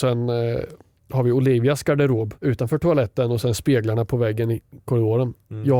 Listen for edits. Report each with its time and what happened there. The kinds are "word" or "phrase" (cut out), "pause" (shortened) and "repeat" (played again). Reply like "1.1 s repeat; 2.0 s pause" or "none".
2.4 s pause